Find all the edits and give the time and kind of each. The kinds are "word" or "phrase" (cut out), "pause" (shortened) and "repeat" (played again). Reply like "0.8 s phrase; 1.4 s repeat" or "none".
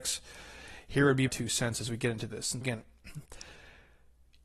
1.3 s word; 2.6 s word